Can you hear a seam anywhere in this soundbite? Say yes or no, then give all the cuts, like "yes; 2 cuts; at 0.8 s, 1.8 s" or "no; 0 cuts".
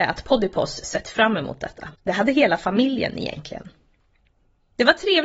yes; 1 cut; at 1.9 s